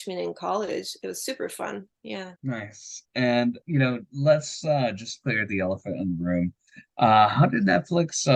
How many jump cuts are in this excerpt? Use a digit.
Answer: 2